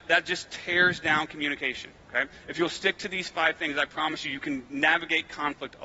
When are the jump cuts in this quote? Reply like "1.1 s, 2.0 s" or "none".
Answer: 2.0 s